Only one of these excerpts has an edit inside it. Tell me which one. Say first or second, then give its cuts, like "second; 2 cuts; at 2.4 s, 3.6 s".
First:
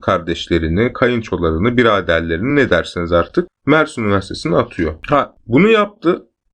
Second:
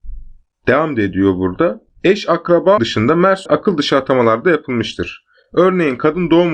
second; 2 cuts; at 2.8 s, 3.5 s